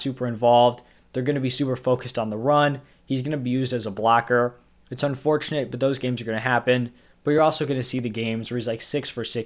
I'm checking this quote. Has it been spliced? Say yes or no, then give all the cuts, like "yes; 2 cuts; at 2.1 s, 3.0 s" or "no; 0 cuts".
no; 0 cuts